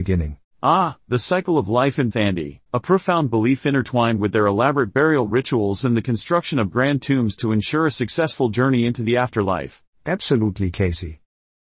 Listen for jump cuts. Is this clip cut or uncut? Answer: cut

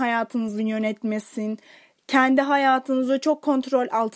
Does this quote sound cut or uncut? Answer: uncut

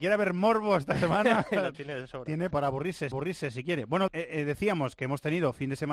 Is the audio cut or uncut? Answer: cut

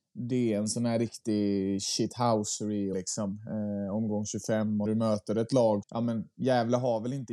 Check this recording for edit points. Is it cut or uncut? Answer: cut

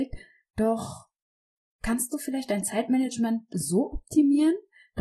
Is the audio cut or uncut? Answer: uncut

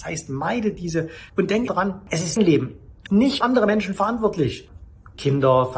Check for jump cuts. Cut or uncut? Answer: cut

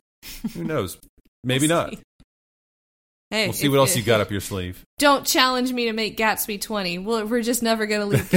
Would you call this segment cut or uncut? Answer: uncut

